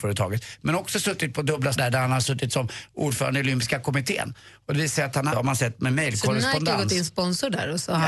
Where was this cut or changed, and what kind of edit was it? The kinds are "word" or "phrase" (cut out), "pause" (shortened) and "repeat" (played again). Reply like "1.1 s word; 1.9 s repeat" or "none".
1.7 s word; 5.3 s word; 7.1 s word